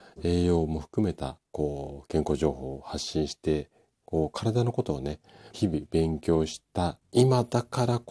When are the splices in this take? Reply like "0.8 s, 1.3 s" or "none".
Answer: 5.5 s, 7.0 s